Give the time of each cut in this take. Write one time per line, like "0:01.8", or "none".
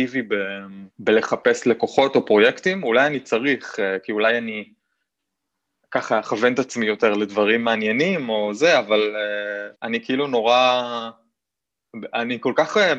0:00.9
0:09.7